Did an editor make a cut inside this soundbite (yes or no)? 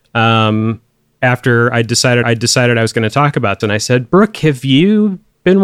yes